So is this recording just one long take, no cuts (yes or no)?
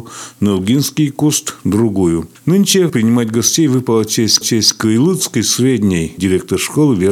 no